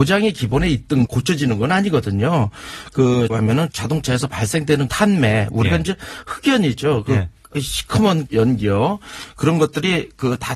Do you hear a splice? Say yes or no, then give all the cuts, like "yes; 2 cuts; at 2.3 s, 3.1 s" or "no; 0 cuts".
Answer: yes; 5 cuts; at 1.1 s, 3.3 s, 3.7 s, 4.9 s, 8.3 s